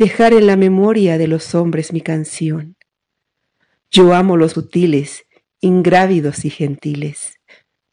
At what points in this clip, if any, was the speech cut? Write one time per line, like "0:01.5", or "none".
0:04.5

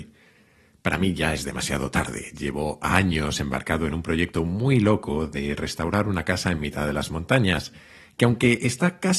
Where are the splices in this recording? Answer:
none

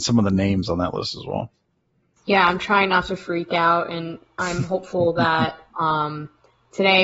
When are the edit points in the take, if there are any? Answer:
none

